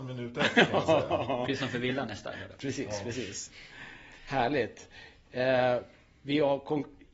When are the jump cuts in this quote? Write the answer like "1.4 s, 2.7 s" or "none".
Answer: none